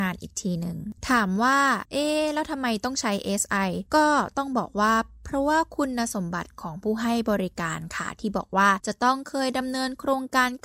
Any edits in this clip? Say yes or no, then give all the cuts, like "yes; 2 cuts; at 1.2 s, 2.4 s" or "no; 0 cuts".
no; 0 cuts